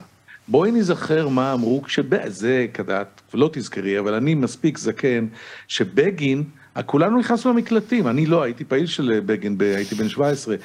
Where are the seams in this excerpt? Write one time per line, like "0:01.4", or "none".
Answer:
none